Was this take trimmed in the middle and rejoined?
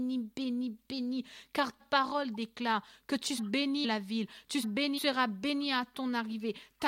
yes; 5 cuts; at 1.8 s, 3.4 s, 3.8 s, 4.6 s, 5.0 s

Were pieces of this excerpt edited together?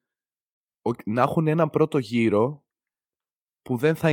no; 0 cuts

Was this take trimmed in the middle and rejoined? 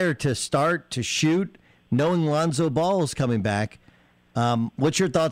no; 0 cuts

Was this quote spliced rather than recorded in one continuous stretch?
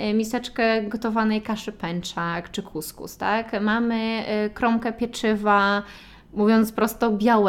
no; 0 cuts

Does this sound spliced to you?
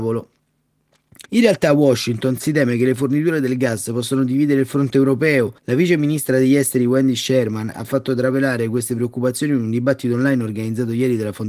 yes; 2 cuts; at 1.3 s, 5.6 s

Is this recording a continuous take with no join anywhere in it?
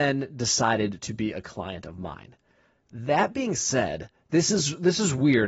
yes; 0 cuts

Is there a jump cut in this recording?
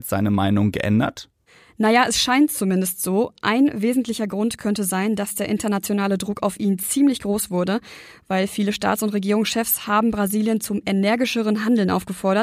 no; 0 cuts

